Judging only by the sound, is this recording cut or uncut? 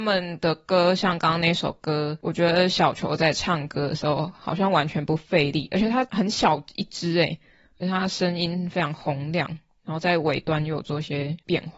uncut